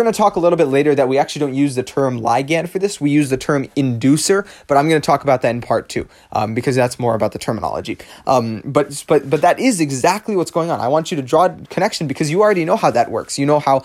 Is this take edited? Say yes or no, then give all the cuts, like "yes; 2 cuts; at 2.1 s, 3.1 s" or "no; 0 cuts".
no; 0 cuts